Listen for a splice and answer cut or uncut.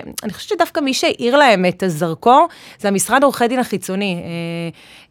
uncut